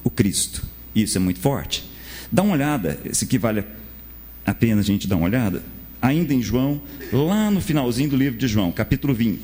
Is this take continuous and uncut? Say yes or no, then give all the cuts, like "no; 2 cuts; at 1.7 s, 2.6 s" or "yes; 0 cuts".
yes; 0 cuts